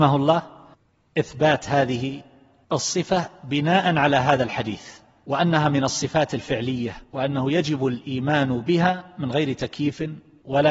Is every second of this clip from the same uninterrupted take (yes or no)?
no